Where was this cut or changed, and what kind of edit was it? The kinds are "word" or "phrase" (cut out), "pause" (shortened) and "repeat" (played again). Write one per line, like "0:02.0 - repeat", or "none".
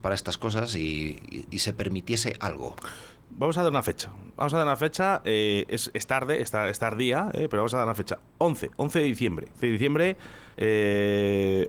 0:09.5 - pause
0:10.5 - pause